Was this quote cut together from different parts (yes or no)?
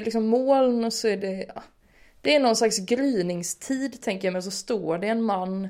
no